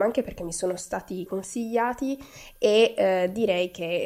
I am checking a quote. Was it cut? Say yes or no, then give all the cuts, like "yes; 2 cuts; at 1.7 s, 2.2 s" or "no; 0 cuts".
yes; 1 cut; at 1.3 s